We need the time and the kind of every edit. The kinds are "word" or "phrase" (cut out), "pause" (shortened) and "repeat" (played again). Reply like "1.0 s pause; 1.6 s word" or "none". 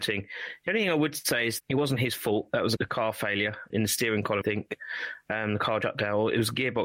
1.6 s word; 2.8 s word; 3.7 s word; 4.4 s word; 5.8 s word